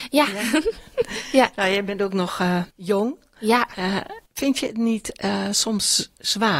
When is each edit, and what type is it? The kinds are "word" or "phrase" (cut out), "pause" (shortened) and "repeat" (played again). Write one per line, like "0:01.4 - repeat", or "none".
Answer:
0:02.7 - pause
0:04.3 - pause